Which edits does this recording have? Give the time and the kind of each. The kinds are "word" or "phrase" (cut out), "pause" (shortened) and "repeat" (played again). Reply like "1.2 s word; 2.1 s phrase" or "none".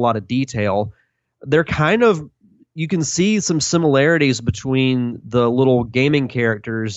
none